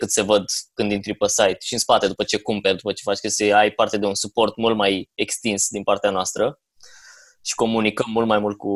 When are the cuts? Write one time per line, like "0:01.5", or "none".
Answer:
none